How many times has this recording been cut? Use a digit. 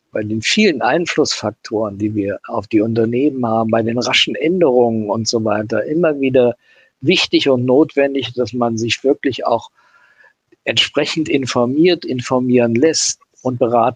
0